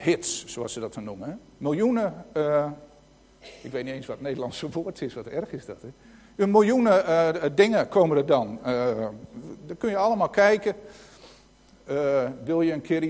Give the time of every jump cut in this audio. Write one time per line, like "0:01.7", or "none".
none